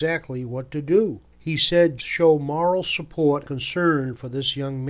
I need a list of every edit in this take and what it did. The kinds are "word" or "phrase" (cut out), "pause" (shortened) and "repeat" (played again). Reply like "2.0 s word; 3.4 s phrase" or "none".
2.0 s word; 3.4 s word